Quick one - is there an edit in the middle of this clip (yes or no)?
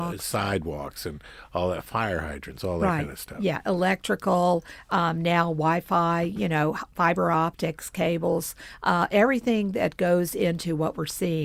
no